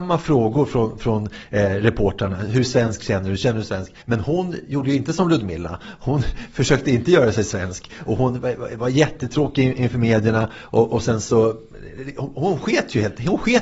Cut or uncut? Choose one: cut